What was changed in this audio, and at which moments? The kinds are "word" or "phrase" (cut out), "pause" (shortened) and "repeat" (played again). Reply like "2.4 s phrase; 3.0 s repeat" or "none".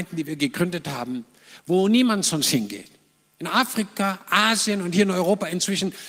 none